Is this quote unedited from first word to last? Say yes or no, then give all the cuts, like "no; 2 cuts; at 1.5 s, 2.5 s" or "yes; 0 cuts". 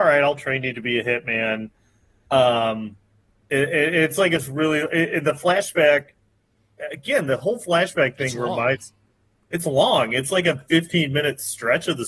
yes; 0 cuts